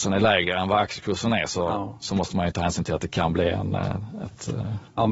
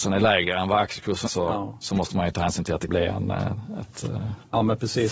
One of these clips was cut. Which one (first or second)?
second